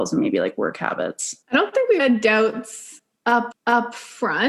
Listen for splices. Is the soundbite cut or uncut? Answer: cut